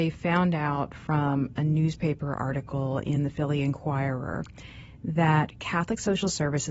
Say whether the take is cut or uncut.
uncut